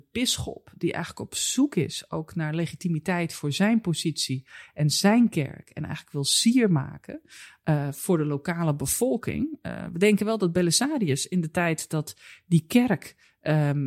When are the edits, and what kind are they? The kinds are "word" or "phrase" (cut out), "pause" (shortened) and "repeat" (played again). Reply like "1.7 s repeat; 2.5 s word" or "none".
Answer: none